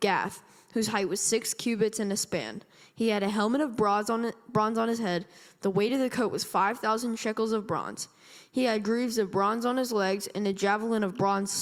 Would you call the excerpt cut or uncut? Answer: uncut